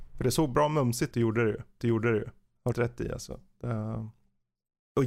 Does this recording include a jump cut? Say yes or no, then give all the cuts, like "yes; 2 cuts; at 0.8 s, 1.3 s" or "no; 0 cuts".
yes; 3 cuts; at 1.1 s, 1.8 s, 2.7 s